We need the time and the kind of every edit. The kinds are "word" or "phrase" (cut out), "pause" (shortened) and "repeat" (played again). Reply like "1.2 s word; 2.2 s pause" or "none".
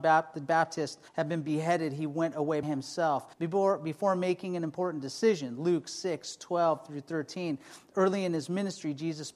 1.1 s pause; 2.6 s word; 3.3 s pause

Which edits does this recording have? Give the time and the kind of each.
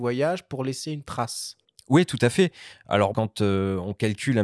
1.6 s pause; 3.1 s word

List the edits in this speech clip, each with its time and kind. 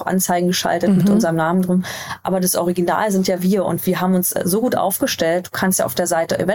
none

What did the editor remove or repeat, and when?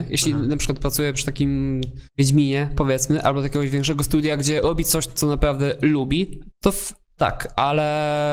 2.1 s pause; 6.5 s word

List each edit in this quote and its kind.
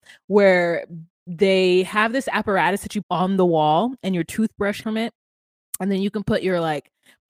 3.0 s word; 4.8 s word

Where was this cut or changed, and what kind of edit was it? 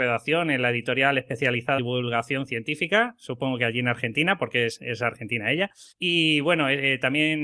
1.8 s word; 5.9 s pause

